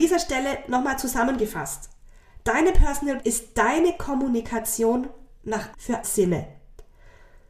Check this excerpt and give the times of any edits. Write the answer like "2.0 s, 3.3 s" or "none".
3.2 s, 5.7 s, 6.0 s